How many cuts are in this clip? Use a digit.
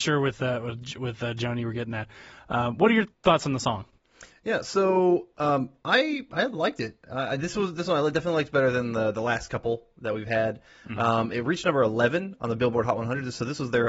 0